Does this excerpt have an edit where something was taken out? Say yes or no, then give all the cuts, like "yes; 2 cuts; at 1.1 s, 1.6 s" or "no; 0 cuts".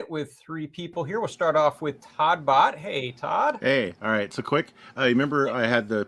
no; 0 cuts